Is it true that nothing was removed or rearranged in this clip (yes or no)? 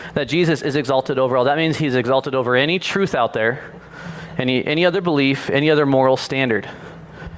yes